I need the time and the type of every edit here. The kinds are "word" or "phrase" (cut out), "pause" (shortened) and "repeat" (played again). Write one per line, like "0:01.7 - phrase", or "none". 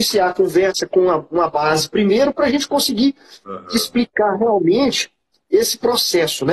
none